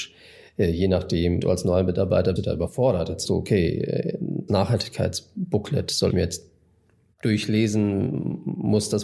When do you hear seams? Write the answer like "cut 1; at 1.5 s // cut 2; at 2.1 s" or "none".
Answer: cut 1; at 1.4 s // cut 2; at 2.4 s // cut 3; at 3.2 s // cut 4; at 4.5 s // cut 5; at 6.1 s